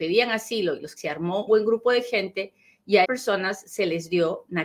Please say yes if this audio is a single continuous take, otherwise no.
no